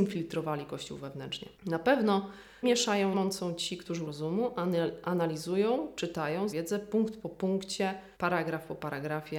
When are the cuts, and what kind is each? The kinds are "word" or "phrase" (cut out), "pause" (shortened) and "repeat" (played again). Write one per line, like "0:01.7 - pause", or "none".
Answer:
0:01.5 - pause
0:02.6 - word
0:03.1 - word
0:04.0 - word
0:06.5 - word
0:08.1 - pause

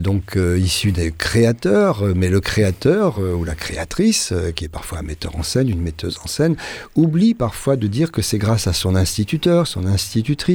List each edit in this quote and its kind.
none

